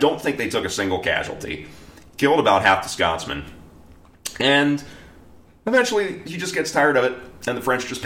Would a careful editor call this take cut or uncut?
uncut